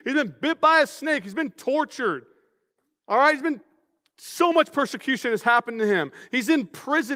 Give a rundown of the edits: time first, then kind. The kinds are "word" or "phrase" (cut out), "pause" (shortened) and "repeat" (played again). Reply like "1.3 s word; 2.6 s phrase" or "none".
none